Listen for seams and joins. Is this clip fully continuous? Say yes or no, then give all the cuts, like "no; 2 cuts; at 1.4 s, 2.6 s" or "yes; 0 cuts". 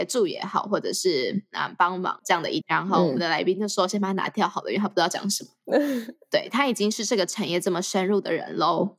no; 1 cut; at 2.6 s